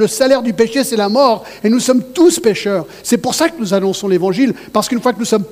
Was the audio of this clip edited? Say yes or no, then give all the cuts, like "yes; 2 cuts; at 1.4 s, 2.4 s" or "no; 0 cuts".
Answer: no; 0 cuts